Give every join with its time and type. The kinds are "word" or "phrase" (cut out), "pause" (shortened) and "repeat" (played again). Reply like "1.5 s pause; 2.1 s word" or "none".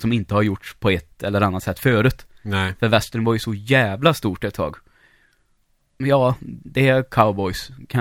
6.0 s word